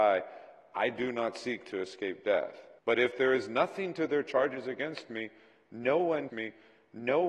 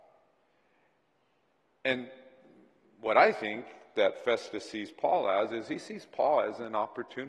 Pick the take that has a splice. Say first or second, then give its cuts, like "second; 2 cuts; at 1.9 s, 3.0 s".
first; 2 cuts; at 2.8 s, 6.3 s